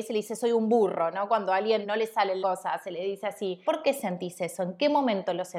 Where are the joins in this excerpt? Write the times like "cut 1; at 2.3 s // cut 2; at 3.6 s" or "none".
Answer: cut 1; at 1.8 s // cut 2; at 2.4 s // cut 3; at 3.7 s